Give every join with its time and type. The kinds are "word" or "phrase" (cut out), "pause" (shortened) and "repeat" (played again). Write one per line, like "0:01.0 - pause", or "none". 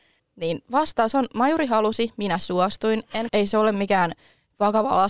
0:03.3 - phrase